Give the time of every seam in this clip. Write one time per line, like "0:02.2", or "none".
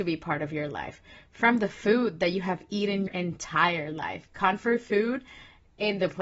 0:03.1